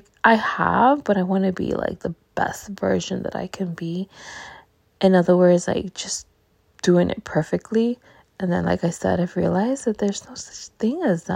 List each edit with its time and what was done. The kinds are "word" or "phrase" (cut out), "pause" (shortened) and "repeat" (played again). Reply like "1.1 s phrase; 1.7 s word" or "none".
none